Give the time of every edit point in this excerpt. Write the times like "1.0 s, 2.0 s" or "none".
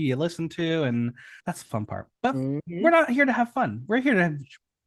1.4 s, 2.1 s

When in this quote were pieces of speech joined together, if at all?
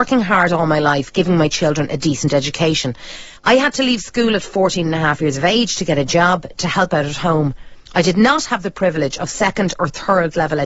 3.4 s, 7.9 s

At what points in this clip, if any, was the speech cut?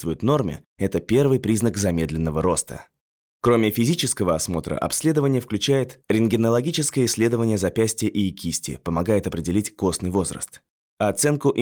none

